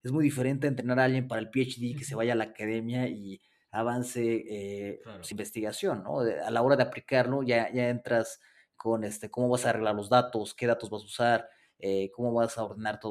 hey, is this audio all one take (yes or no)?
no